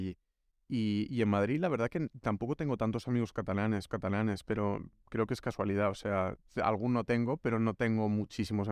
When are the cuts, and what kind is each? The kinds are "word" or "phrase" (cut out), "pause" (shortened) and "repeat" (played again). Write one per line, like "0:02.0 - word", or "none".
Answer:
0:03.9 - repeat

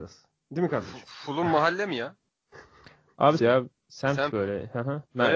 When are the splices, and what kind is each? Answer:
0:03.4 - word

